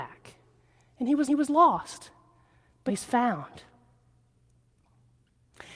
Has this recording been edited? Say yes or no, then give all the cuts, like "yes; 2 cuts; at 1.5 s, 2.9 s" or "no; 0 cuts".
yes; 2 cuts; at 1.3 s, 2.9 s